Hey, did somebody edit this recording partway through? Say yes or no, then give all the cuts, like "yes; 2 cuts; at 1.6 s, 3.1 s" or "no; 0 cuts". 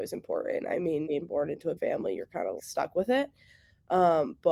yes; 3 cuts; at 1.0 s, 1.8 s, 2.6 s